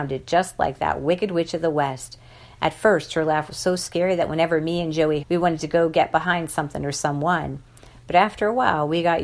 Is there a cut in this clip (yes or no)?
yes